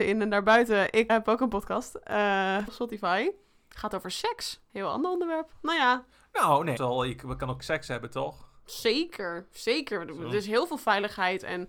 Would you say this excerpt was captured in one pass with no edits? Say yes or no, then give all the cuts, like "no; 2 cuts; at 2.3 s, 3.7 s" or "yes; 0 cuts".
no; 4 cuts; at 1.1 s, 2.7 s, 6.8 s, 7.6 s